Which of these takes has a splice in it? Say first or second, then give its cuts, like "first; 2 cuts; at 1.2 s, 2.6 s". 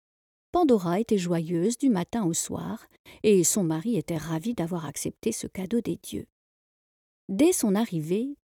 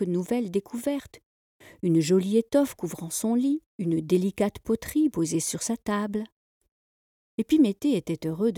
second; 1 cut; at 3.7 s